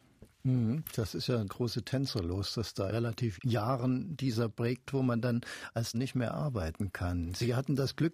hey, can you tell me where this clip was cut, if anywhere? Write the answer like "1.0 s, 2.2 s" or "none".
1.5 s, 2.9 s, 3.4 s, 4.9 s, 5.9 s